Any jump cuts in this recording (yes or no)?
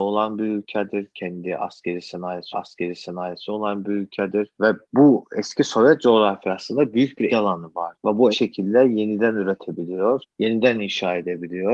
yes